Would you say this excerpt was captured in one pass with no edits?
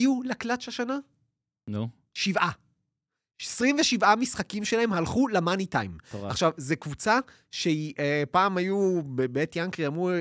yes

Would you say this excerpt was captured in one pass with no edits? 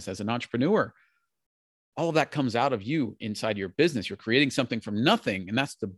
yes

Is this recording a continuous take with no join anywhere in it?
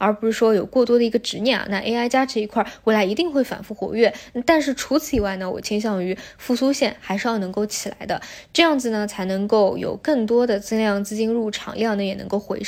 yes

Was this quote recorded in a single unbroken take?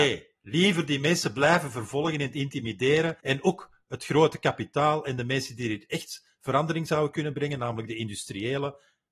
no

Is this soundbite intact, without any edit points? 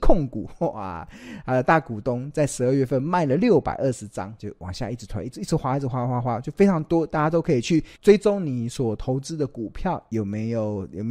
no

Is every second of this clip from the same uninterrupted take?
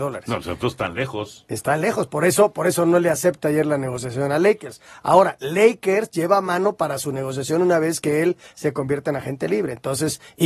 yes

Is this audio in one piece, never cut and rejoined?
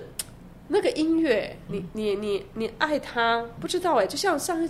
no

